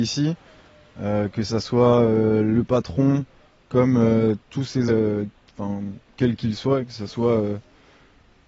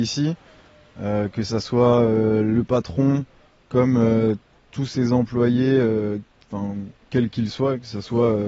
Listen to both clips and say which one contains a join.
first; 2 cuts; at 4.4 s, 4.9 s

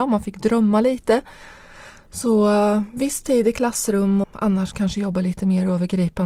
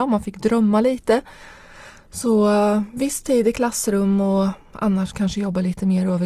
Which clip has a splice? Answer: first; 1 cut; at 4.2 s

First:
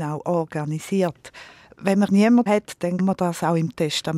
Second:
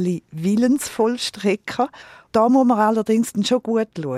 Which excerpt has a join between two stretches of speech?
first; 3 cuts; at 2.1 s, 2.5 s, 3.0 s

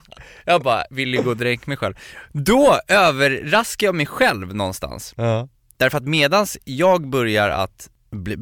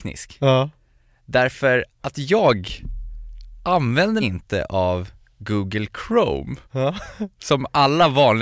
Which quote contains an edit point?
second; 3 cuts; at 1.9 s, 4.2 s, 6.6 s

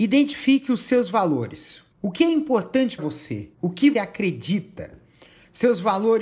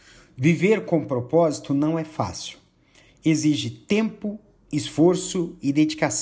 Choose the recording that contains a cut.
first; 4 cuts; at 1.9 s, 3.0 s, 3.5 s, 3.9 s

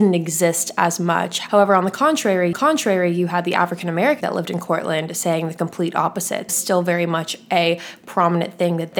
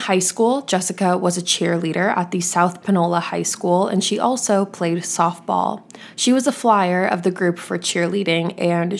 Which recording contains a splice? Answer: first; 3 cuts; at 2.5 s, 4.2 s, 6.5 s

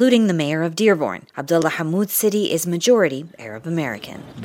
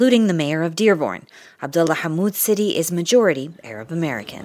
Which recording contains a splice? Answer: first; 1 cut; at 1.3 s

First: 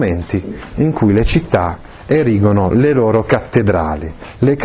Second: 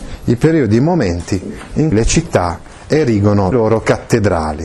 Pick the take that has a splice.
second; 2 cuts; at 1.9 s, 3.5 s

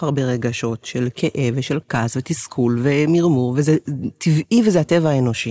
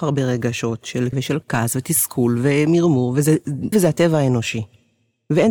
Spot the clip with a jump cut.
second; 2 cuts; at 1.1 s, 3.7 s

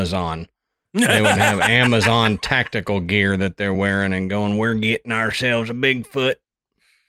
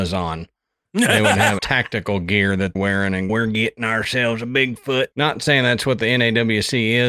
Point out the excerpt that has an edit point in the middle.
second; 4 cuts; at 1.6 s, 2.8 s, 3.3 s, 5.1 s

